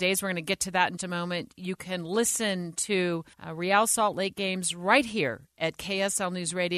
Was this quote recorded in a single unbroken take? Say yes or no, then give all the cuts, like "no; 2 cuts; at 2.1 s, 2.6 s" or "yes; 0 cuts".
no; 2 cuts; at 1.0 s, 3.3 s